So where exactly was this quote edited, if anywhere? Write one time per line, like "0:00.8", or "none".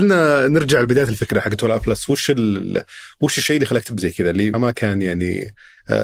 0:04.0
0:04.5